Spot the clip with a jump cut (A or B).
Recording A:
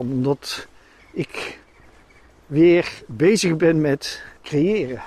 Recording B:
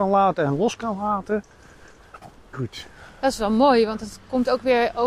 B